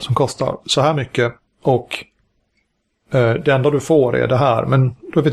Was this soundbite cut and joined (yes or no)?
no